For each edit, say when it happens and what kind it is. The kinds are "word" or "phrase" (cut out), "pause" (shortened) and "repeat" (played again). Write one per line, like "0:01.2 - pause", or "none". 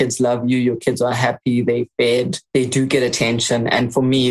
0:02.4 - pause